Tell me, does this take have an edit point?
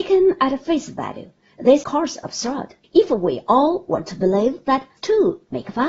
yes; 3 cuts; at 1.8 s, 2.8 s, 5.0 s

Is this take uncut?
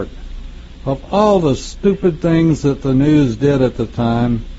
yes; 0 cuts

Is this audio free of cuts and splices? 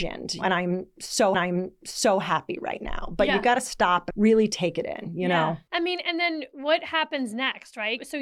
no; 2 cuts; at 1.3 s, 4.1 s

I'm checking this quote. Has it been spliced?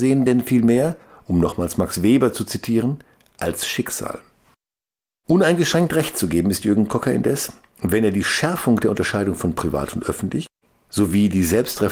no; 0 cuts

